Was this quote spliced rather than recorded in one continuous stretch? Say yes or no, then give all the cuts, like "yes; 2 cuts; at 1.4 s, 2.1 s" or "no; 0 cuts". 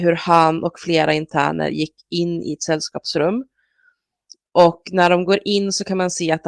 no; 0 cuts